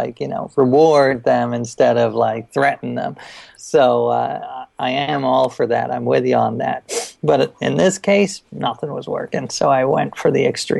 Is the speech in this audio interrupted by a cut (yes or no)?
yes